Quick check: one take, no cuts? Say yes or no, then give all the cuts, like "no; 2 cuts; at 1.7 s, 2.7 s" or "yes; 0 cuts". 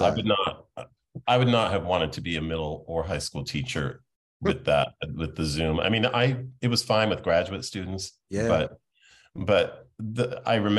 yes; 0 cuts